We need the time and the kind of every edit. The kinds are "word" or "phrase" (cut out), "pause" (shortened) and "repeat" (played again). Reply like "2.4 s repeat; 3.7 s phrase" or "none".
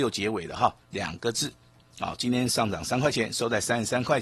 none